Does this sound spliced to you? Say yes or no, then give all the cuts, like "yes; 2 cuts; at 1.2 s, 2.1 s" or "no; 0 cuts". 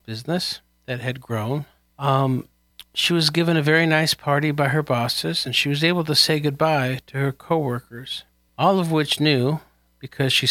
no; 0 cuts